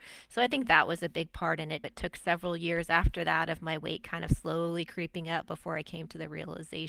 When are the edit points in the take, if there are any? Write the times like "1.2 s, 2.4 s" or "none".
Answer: 1.8 s